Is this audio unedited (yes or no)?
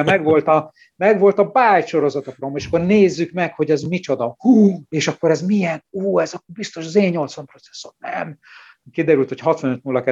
yes